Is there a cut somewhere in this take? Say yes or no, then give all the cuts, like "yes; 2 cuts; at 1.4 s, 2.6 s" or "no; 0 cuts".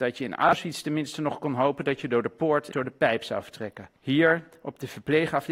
yes; 2 cuts; at 2.7 s, 4.0 s